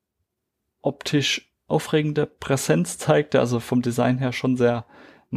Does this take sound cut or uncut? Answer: uncut